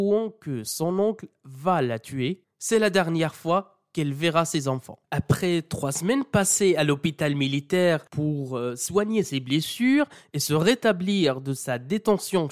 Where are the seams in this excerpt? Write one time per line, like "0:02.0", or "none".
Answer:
none